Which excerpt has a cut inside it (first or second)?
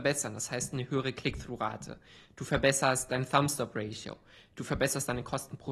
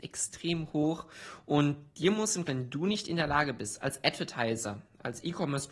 second